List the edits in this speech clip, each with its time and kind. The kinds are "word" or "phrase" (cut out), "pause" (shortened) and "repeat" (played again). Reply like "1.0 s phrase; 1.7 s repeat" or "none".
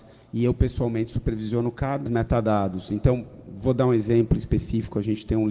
2.1 s phrase